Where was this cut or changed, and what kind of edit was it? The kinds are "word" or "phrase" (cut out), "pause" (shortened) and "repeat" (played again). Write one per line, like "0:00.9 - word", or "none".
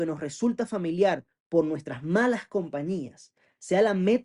none